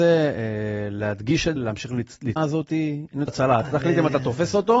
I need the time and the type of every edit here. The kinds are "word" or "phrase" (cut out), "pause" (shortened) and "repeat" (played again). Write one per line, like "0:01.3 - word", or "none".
0:01.6 - word
0:02.4 - word
0:03.3 - phrase